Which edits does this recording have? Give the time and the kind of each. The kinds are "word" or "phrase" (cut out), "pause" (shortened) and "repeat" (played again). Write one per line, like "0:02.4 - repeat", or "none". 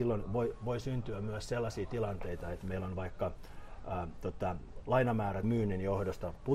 0:05.4 - word